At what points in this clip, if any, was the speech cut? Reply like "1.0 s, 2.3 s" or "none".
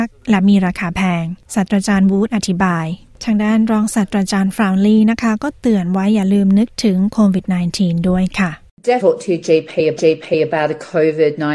9.0 s, 10.0 s